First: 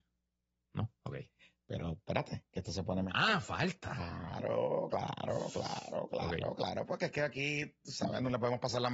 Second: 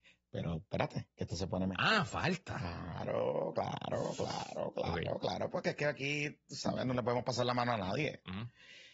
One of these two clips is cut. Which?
first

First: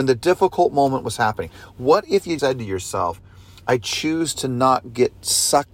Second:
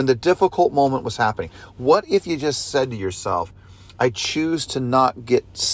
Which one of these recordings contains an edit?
first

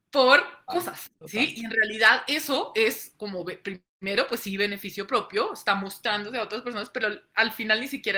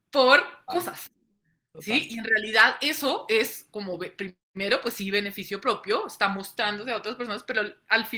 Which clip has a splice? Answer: first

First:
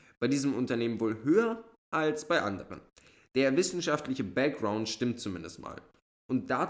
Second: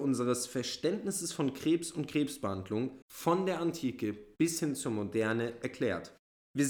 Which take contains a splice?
second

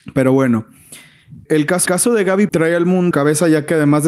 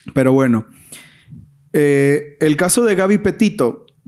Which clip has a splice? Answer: first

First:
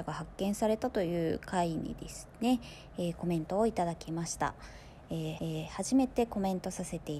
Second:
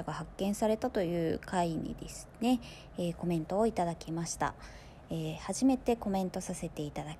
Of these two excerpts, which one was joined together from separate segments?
first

